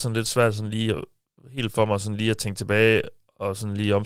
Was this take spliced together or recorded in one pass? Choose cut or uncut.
uncut